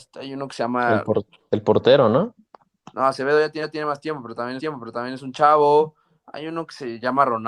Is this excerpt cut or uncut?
cut